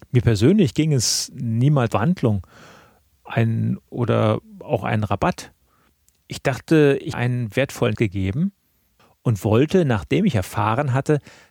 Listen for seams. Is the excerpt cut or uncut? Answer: cut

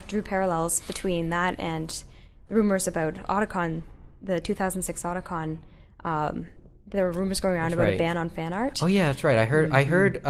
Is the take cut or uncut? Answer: uncut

